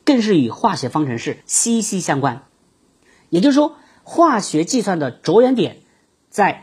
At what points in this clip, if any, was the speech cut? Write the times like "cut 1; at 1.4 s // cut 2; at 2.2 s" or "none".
cut 1; at 1.4 s